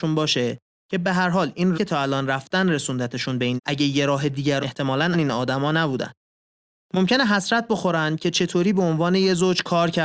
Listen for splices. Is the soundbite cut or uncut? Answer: cut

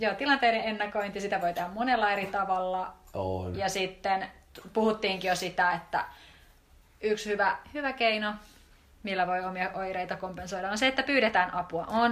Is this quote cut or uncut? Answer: uncut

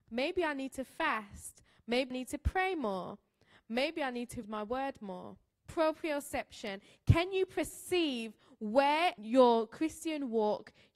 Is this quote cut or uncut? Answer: cut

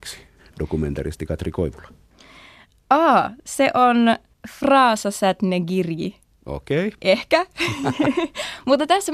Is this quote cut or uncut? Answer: uncut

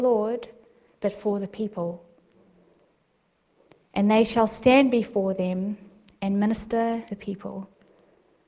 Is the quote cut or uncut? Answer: cut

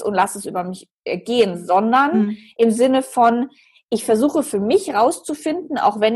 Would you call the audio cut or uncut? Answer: uncut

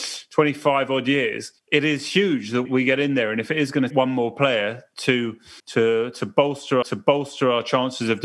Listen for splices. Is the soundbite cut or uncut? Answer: cut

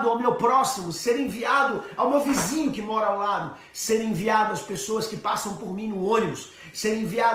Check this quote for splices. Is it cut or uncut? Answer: uncut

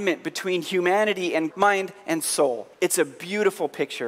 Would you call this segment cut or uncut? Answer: cut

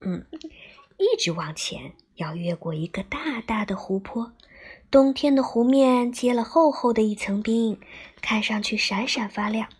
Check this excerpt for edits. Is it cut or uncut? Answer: uncut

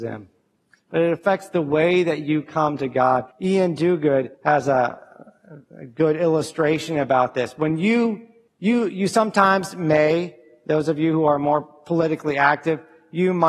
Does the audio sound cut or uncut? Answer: cut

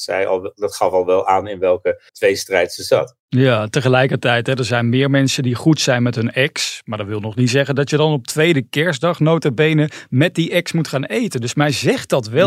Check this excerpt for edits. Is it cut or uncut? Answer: cut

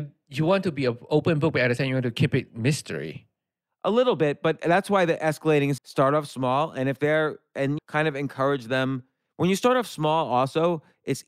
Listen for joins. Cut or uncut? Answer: cut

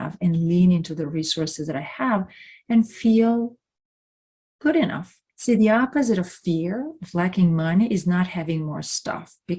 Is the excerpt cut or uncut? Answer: cut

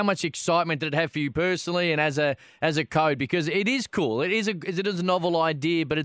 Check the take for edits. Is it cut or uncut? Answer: uncut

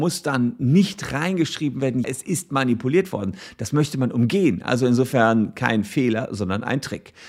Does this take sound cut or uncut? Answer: cut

